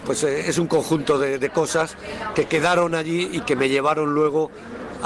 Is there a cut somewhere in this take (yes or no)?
no